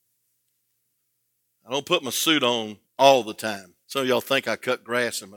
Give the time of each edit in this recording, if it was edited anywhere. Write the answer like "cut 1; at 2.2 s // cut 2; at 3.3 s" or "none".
cut 1; at 2.9 s // cut 2; at 3.8 s

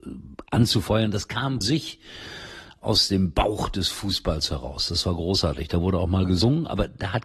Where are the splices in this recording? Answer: cut 1; at 1.6 s

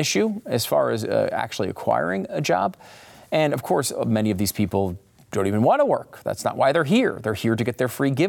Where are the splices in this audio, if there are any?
none

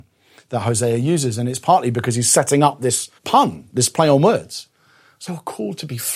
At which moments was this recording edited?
cut 1; at 3.2 s // cut 2; at 5.3 s

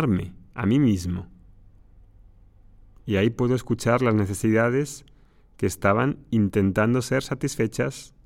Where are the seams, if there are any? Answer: none

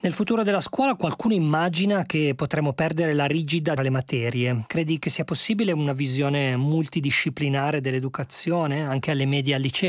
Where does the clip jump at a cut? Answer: cut 1; at 3.8 s

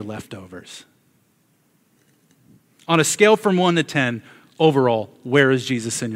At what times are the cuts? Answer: none

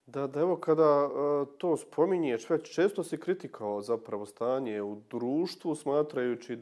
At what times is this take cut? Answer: none

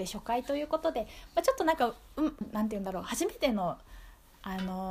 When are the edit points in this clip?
cut 1; at 2.4 s

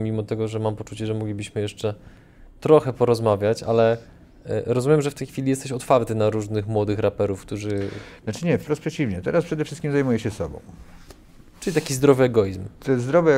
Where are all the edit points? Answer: none

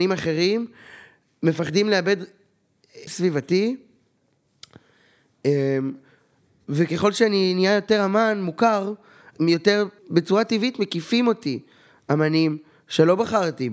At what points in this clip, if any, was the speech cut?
cut 1; at 3.1 s // cut 2; at 9.3 s // cut 3; at 10.0 s

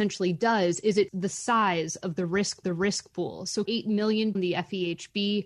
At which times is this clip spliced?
cut 1; at 1.1 s // cut 2; at 2.6 s // cut 3; at 3.7 s // cut 4; at 4.3 s

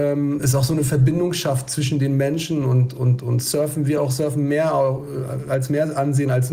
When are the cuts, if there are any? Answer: none

